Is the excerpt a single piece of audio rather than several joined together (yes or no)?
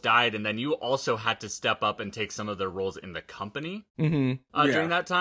yes